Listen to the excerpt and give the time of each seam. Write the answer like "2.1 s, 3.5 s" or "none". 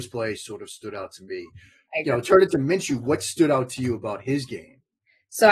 none